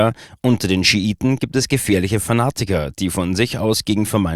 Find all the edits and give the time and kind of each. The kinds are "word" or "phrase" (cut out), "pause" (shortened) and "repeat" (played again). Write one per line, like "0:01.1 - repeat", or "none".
none